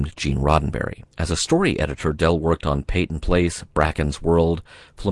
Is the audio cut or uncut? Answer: cut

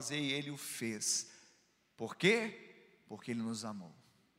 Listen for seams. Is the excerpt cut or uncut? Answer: uncut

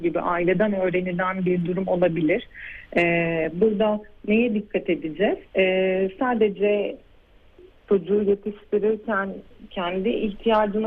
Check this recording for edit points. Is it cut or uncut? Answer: cut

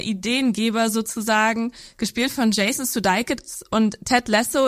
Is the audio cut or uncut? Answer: uncut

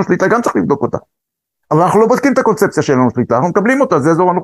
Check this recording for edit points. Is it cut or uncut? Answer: uncut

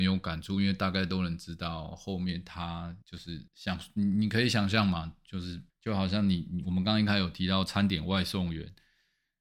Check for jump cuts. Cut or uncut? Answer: cut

